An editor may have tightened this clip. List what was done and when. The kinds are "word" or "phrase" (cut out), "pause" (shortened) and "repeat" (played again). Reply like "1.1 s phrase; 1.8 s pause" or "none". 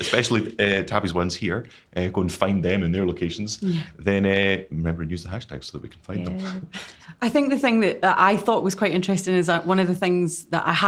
none